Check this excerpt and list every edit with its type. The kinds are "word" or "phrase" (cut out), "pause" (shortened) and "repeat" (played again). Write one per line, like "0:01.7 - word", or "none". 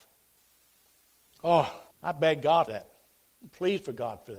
0:01.9 - pause
0:02.7 - word

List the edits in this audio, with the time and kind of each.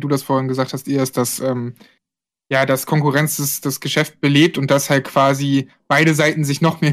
none

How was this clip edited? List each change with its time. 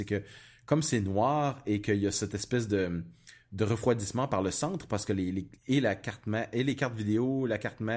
0:05.6 - pause

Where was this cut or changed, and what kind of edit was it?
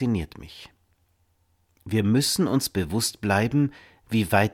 none

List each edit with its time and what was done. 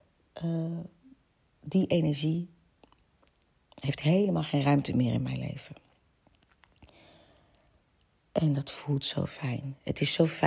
none

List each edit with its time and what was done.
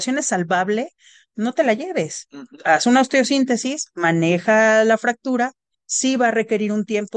none

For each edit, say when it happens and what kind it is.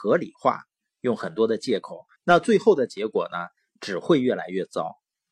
0:02.2 - pause

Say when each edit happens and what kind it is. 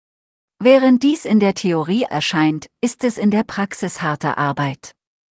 0:02.1 - word

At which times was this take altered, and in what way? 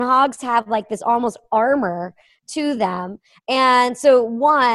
none

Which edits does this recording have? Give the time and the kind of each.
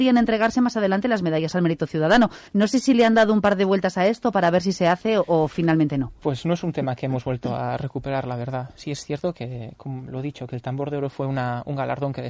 0:02.5 - pause

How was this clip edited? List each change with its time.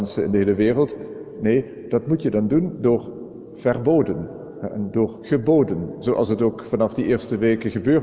none

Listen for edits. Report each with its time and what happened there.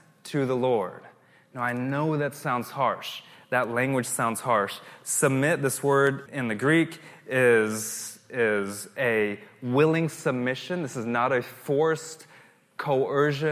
0:06.3 - word

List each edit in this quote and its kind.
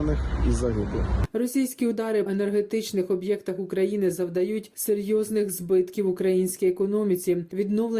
0:02.3 - word

